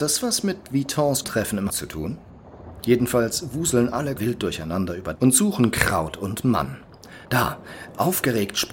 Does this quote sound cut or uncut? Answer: cut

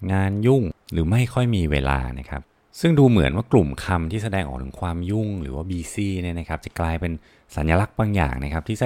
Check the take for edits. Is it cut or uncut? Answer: uncut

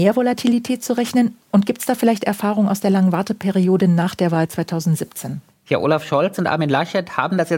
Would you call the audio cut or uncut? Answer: uncut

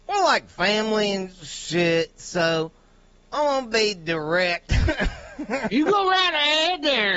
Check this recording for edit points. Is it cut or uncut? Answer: uncut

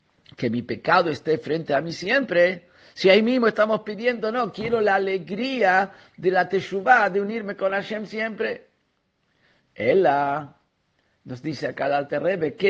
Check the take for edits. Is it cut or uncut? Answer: uncut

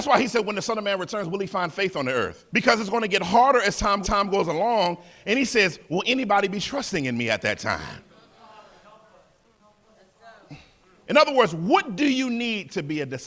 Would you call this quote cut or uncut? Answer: cut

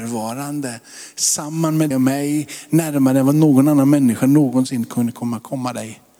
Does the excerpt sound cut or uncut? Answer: cut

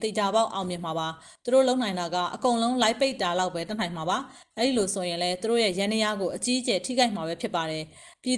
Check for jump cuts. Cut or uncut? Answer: uncut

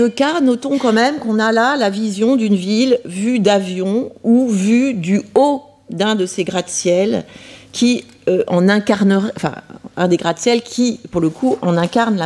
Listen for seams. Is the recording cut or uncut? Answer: uncut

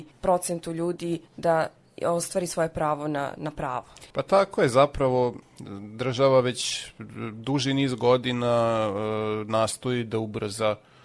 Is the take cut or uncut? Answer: cut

